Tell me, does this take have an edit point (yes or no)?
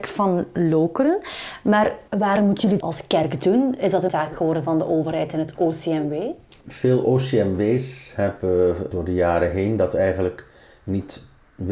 yes